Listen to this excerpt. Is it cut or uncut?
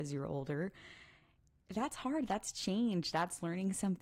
uncut